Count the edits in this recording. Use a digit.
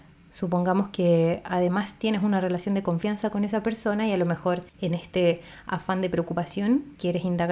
1